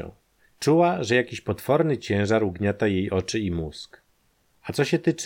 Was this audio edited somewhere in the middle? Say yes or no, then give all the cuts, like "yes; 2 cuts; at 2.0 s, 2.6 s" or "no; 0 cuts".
no; 0 cuts